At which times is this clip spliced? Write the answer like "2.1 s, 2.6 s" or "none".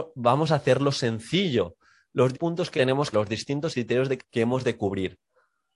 2.3 s, 2.8 s, 3.1 s, 3.7 s, 4.2 s